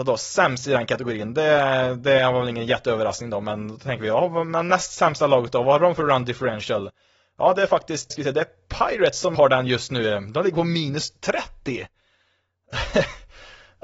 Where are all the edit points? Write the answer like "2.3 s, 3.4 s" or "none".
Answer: 8.1 s, 9.4 s